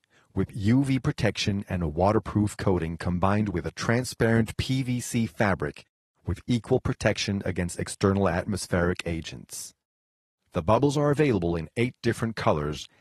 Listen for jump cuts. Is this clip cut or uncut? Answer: uncut